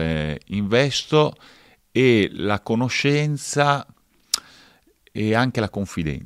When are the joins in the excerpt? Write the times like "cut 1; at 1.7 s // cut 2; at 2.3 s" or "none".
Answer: none